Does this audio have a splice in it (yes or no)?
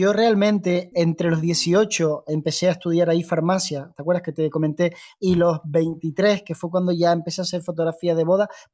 yes